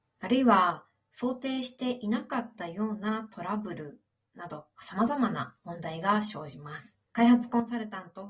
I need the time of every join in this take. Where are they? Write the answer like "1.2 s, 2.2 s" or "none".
7.0 s